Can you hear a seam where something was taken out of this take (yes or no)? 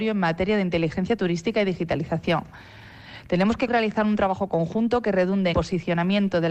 yes